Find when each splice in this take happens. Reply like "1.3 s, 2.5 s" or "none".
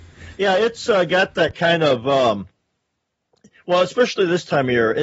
none